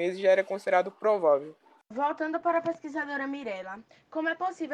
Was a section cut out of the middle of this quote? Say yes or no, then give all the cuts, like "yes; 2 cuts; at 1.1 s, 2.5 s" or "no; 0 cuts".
no; 0 cuts